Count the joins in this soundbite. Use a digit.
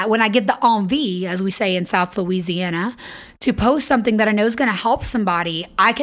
0